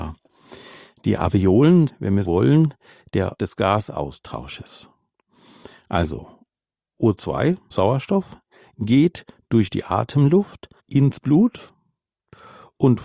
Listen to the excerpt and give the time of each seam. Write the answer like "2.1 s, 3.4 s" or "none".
1.9 s, 2.2 s, 3.4 s, 7.7 s, 10.8 s

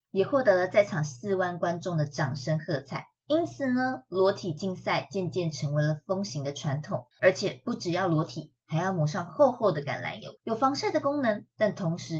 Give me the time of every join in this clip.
7.1 s, 10.4 s

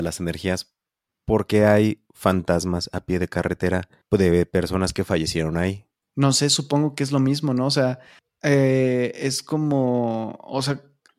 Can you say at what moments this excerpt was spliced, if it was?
4.0 s, 6.0 s, 8.2 s

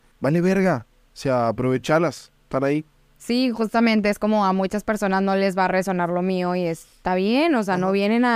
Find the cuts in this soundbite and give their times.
none

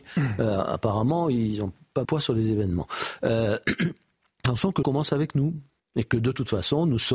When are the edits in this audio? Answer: 2.0 s, 4.8 s, 5.8 s

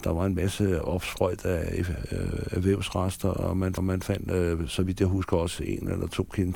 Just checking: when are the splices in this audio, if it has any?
3.8 s

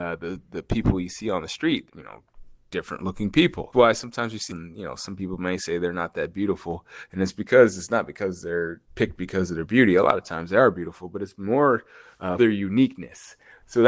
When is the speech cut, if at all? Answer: 1.9 s, 3.7 s, 4.5 s, 8.9 s, 12.4 s

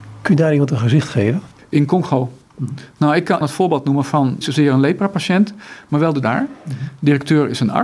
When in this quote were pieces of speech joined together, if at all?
1.5 s, 3.4 s, 4.4 s, 6.2 s

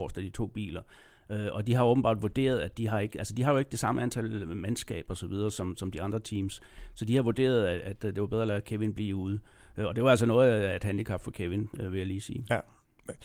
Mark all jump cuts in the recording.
none

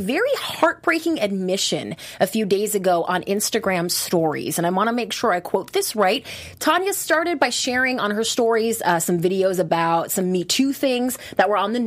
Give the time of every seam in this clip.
none

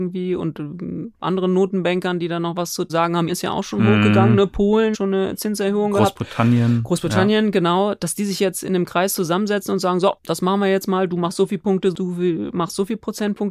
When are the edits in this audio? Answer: 2.9 s, 3.3 s, 4.9 s, 10.2 s

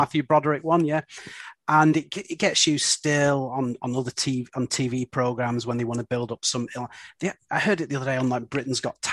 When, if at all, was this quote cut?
none

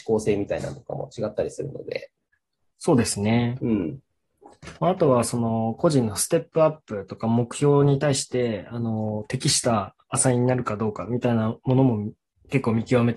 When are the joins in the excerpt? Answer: 4.8 s

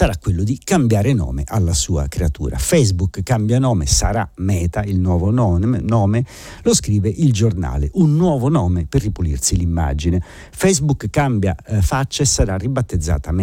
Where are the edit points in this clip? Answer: none

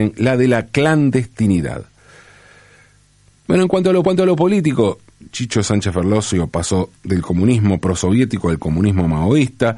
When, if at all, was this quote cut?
4.0 s, 7.0 s

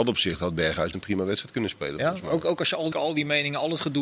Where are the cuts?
0.9 s, 2.9 s

